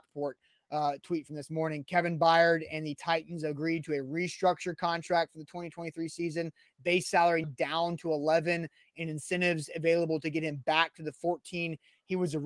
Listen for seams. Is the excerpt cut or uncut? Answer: cut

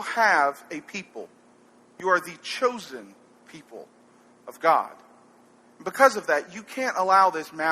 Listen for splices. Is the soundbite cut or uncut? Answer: uncut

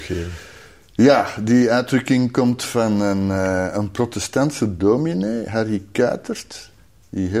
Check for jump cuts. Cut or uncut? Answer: uncut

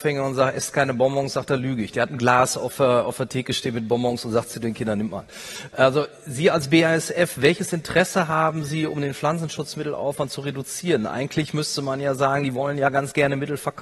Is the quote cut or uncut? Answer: uncut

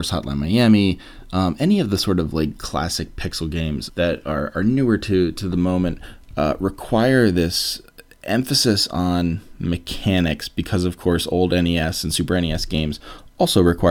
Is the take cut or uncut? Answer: cut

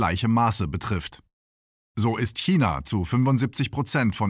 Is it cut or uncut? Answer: uncut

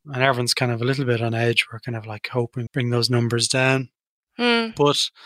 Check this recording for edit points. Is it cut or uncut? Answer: cut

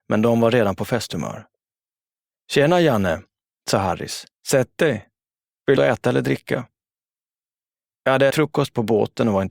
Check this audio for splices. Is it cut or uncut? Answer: cut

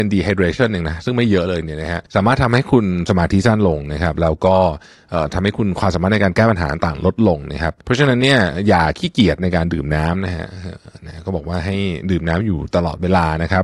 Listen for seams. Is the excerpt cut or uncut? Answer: cut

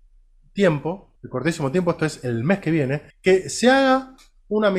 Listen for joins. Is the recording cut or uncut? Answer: cut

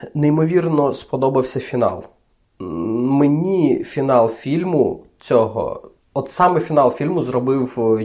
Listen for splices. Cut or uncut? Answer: uncut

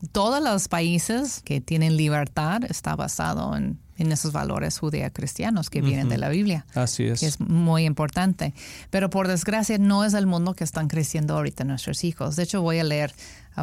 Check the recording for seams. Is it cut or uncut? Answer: uncut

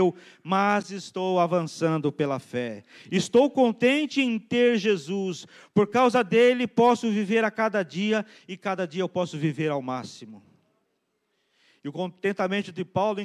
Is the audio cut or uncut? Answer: uncut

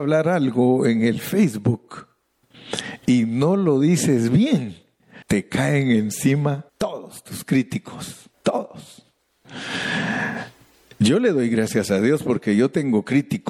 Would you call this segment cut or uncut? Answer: cut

